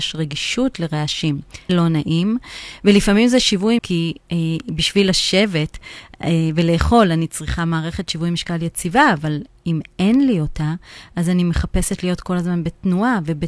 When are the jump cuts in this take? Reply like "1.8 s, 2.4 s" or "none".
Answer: 1.7 s, 3.8 s